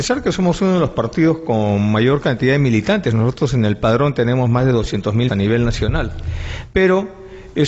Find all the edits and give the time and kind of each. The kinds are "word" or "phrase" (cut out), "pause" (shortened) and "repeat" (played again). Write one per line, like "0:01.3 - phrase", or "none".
0:05.3 - word

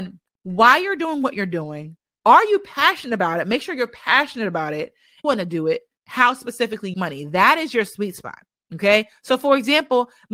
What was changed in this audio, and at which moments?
0:02.1 - pause
0:05.2 - phrase
0:06.0 - pause
0:06.9 - phrase

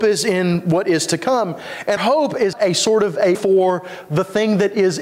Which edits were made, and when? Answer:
0:02.0 - word
0:02.5 - word
0:03.3 - word

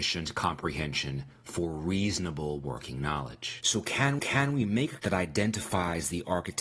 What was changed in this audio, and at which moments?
0:04.2 - repeat
0:05.0 - word

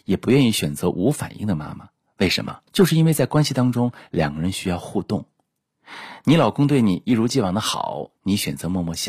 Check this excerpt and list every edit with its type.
0:02.7 - pause
0:08.2 - pause

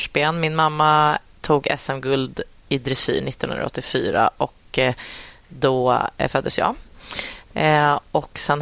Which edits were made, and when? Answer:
none

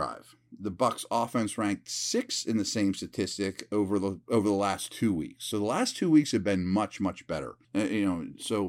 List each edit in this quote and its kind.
0:07.6 - pause

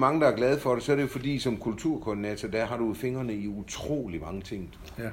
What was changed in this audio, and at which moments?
none

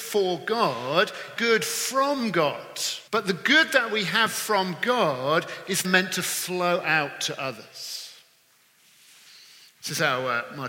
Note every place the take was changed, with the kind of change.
0:01.4 - phrase
0:03.1 - pause
0:05.8 - word

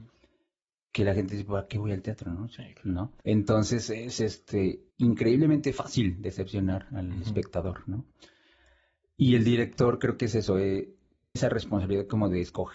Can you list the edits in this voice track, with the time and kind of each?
0:02.6 - word
0:03.2 - pause
0:04.9 - pause
0:11.4 - word

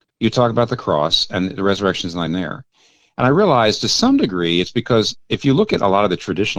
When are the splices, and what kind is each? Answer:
0:02.3 - word

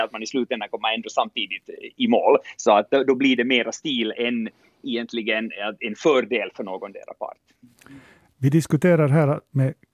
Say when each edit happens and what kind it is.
none

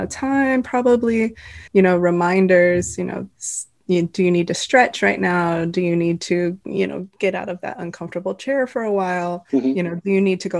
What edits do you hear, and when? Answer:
0:01.7 - pause
0:03.3 - pause
0:09.5 - pause

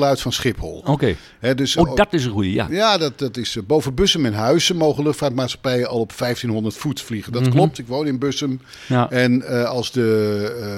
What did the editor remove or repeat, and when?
0:01.8 - word

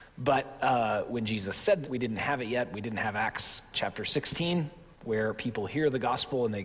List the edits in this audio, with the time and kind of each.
0:01.8 - word
0:03.7 - word
0:04.9 - pause

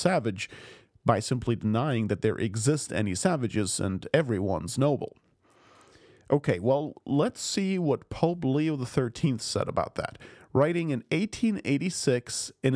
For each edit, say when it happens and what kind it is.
none

